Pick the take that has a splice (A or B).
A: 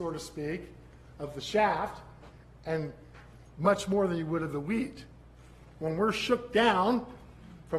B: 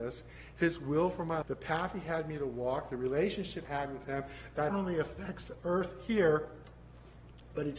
B